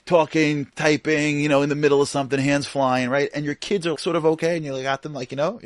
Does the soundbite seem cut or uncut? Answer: cut